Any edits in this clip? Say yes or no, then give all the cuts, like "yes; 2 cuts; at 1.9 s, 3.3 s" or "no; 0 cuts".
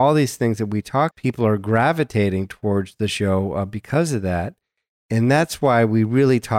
yes; 1 cut; at 1.1 s